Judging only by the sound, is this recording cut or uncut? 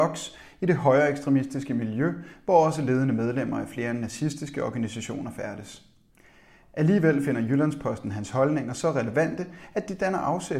uncut